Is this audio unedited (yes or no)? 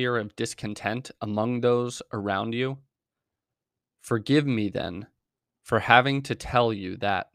yes